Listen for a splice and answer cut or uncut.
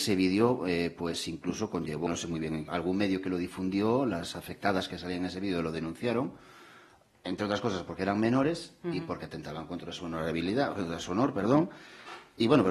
cut